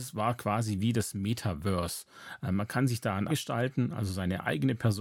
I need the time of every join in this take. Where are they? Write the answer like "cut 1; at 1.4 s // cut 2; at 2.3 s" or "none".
cut 1; at 3.3 s